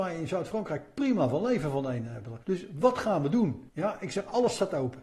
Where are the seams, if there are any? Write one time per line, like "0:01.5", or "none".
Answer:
0:02.4
0:03.7